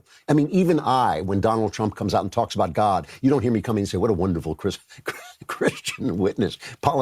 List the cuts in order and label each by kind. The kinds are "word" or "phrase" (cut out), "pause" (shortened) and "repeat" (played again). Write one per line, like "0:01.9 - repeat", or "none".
none